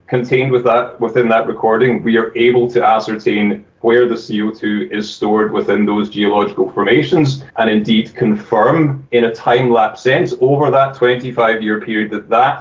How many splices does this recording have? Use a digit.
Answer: 3